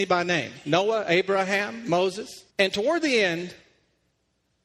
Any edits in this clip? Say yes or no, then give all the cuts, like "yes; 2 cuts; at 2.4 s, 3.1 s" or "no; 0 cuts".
yes; 1 cut; at 2.5 s